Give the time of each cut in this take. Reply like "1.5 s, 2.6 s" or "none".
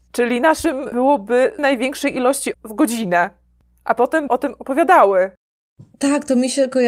0.9 s, 1.6 s, 2.5 s, 4.3 s

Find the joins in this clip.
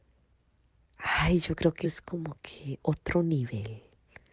1.8 s

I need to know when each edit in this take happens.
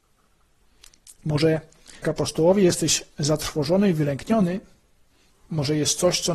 2.0 s

